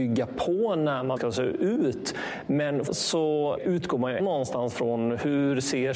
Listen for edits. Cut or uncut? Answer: cut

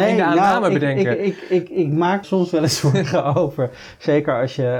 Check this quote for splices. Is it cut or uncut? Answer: cut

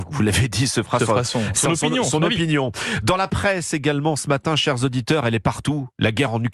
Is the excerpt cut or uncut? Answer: uncut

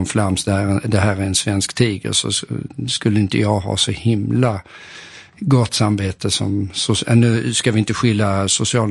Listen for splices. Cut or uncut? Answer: uncut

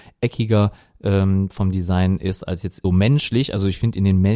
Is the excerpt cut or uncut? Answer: cut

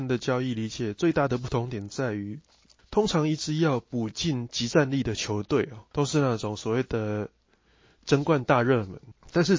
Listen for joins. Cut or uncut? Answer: cut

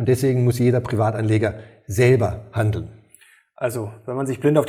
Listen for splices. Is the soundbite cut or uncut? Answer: uncut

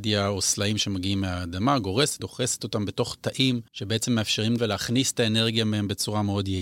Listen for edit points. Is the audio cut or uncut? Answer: cut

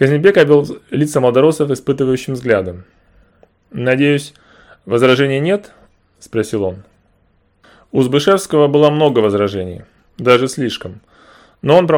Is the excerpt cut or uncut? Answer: uncut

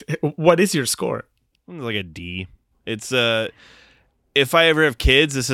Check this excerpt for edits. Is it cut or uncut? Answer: uncut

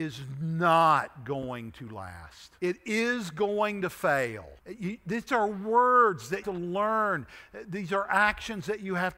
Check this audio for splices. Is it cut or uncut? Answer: cut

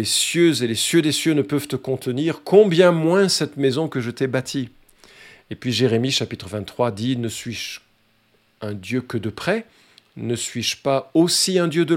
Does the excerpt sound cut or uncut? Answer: uncut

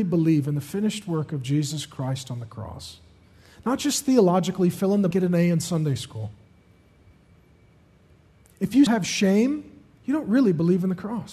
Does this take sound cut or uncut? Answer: cut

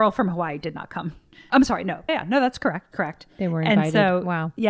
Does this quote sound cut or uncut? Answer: cut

